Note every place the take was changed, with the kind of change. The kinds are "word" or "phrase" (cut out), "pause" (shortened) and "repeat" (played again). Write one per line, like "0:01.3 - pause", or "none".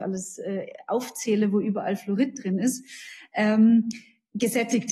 none